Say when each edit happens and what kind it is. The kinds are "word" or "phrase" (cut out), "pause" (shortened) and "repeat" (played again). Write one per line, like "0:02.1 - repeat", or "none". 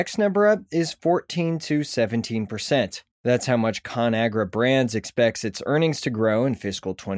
0:03.1 - pause

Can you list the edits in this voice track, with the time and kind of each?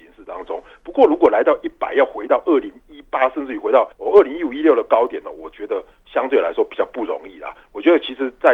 0:03.9 - pause

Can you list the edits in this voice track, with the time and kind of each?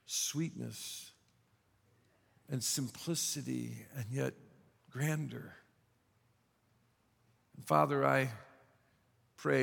none

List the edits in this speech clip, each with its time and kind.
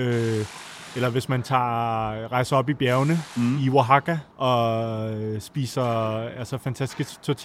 0:04.3 - pause

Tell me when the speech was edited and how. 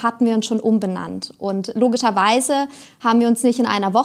none

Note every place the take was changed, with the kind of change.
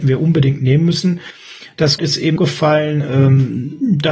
0:02.0 - word
0:02.4 - word

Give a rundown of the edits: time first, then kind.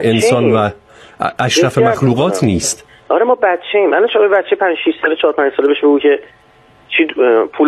none

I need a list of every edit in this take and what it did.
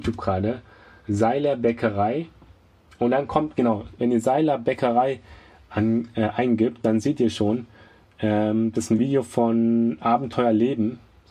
none

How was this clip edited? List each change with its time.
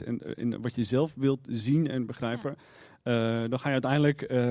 none

